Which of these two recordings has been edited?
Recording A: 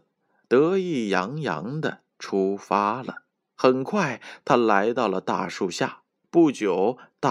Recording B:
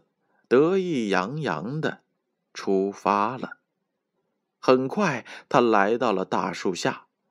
A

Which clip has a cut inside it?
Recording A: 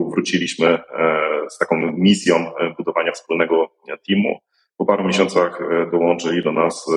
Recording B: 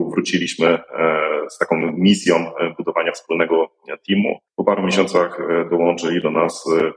B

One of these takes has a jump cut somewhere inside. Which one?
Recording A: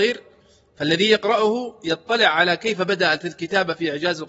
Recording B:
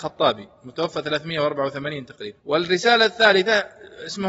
B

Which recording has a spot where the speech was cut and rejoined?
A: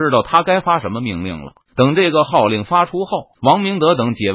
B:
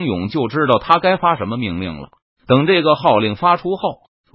A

